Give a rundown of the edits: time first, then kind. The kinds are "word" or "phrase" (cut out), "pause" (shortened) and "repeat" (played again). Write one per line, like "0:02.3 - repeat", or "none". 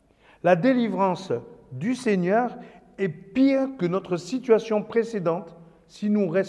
none